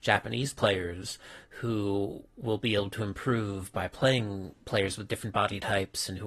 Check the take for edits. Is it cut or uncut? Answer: uncut